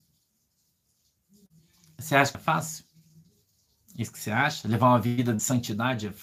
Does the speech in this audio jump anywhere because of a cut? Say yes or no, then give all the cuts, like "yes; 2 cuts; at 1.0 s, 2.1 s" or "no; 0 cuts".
yes; 1 cut; at 2.3 s